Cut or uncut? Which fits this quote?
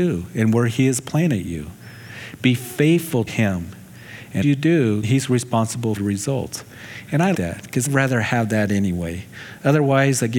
cut